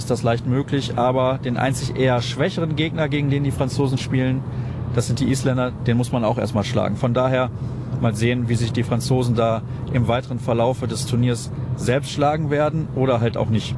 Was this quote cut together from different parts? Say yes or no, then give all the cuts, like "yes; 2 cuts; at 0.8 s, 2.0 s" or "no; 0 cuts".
no; 0 cuts